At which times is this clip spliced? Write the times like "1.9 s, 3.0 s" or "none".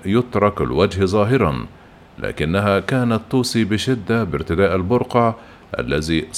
none